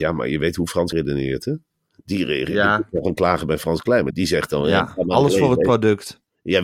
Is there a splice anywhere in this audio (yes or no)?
yes